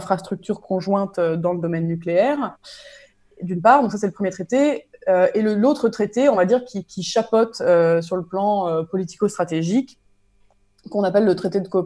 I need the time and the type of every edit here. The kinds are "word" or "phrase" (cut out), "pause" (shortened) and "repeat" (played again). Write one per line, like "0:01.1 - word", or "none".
none